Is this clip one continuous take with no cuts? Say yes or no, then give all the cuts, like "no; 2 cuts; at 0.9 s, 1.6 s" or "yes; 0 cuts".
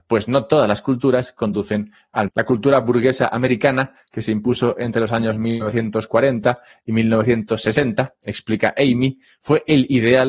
no; 1 cut; at 2.3 s